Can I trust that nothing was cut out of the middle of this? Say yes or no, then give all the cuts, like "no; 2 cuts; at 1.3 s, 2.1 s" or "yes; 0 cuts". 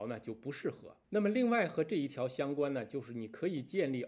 no; 1 cut; at 1.0 s